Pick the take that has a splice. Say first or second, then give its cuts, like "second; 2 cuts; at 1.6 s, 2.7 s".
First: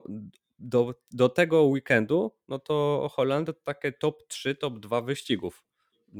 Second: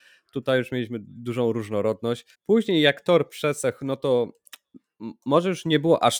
second; 1 cut; at 2.3 s